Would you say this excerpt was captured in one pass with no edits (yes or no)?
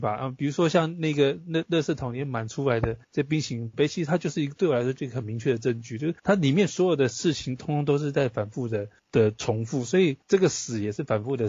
no